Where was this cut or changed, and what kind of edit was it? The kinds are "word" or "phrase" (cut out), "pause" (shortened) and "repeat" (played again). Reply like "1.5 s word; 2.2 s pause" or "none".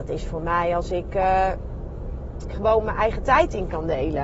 2.5 s phrase

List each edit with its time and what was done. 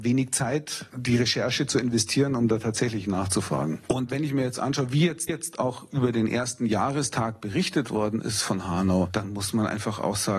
5.3 s repeat

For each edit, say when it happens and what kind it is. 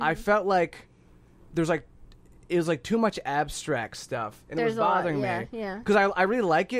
none

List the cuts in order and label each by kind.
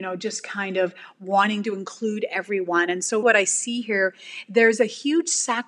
3.2 s word

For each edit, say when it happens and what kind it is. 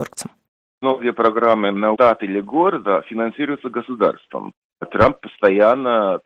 1.9 s word

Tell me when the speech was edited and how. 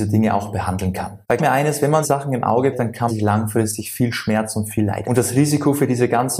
1.4 s word; 2.0 s word; 2.7 s word; 3.1 s word; 5.0 s word

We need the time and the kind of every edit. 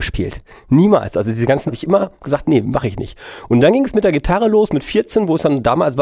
1.7 s word

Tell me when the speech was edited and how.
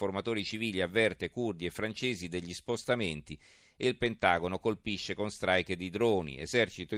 none

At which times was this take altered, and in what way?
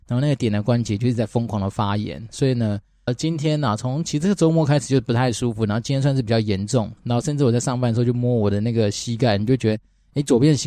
3.1 s word

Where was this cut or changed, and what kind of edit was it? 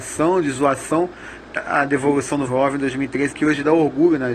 1.6 s word; 2.5 s word; 3.3 s word

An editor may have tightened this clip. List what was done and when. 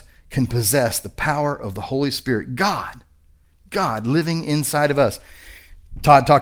none

